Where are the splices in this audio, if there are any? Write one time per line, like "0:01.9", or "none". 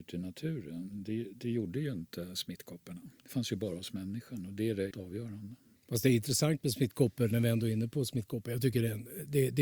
0:03.2
0:04.9
0:05.8